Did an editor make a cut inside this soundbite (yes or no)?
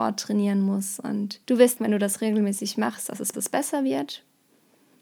yes